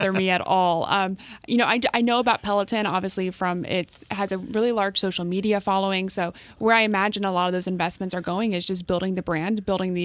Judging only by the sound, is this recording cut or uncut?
uncut